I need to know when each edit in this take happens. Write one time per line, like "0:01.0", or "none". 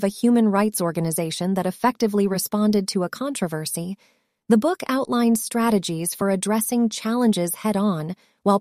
none